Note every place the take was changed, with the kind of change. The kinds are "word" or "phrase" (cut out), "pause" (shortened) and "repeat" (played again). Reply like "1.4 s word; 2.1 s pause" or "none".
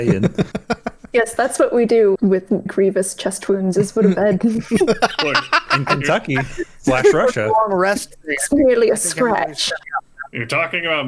2.1 s word; 2.7 s word; 4.0 s word